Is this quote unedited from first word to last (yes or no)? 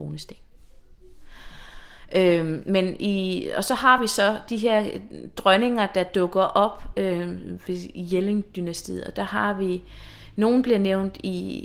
yes